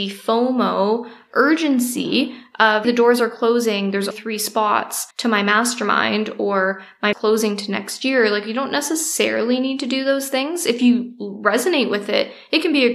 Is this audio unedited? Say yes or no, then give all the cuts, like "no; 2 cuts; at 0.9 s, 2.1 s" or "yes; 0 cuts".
no; 4 cuts; at 2.8 s, 4.1 s, 5.1 s, 7.1 s